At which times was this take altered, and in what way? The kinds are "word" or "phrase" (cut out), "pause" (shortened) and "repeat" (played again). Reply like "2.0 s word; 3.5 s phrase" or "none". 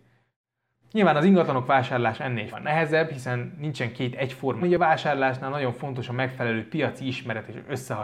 2.5 s word; 4.6 s word